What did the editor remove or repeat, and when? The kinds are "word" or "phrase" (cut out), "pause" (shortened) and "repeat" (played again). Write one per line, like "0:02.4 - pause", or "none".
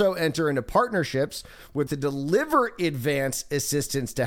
0:01.9 - word